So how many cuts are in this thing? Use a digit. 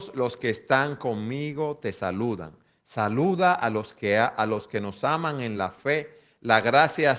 0